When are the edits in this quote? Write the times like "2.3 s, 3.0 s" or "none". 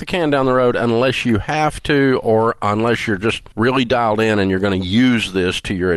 3.5 s